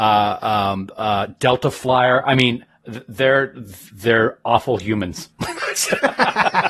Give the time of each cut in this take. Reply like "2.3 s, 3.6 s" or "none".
5.3 s